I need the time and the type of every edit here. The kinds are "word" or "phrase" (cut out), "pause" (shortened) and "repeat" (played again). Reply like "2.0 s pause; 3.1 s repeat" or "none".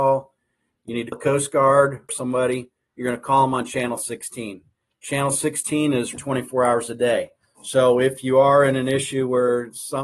1.1 s word; 2.1 s word; 6.1 s word; 7.4 s pause